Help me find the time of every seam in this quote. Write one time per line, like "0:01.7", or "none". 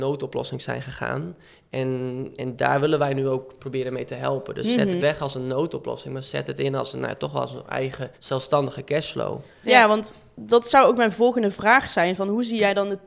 0:02.4
0:05.0
0:08.1